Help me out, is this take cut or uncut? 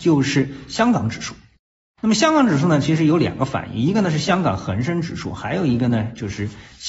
uncut